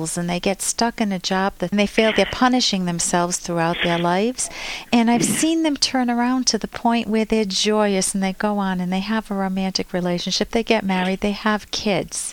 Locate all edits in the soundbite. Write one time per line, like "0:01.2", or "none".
0:01.7
0:02.1

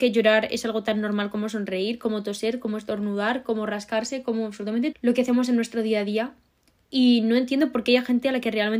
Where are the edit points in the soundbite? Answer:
0:04.9

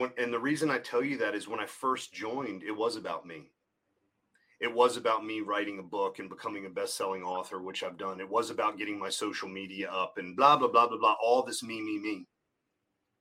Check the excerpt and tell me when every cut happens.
none

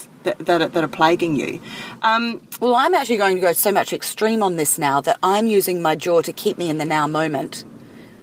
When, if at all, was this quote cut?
none

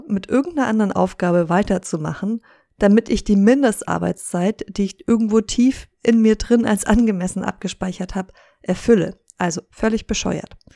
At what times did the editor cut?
none

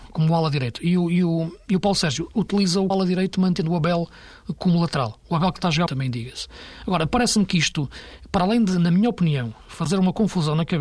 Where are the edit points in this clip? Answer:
0:02.9
0:05.9

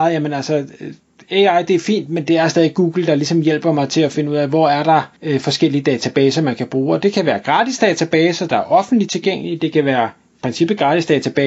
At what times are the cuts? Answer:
0:05.2

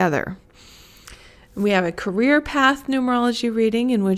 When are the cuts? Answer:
none

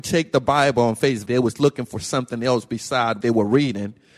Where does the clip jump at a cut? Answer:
0:01.3
0:03.2

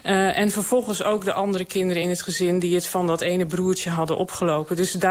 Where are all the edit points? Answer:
none

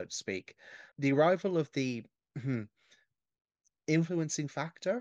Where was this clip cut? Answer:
0:00.9

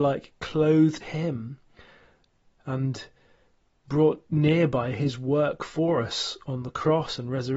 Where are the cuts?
0:01.0

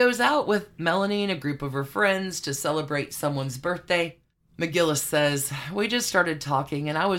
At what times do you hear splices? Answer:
none

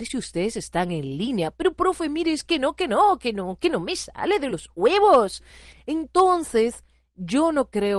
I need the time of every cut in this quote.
none

